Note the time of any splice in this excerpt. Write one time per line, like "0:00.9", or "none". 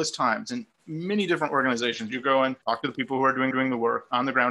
0:02.6
0:03.5